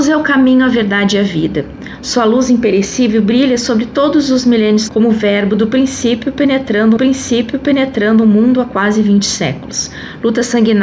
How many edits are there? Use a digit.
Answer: 2